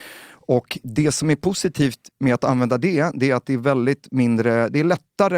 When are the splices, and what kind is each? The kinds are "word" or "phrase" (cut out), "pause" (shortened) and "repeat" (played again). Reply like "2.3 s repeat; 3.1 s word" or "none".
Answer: 2.1 s pause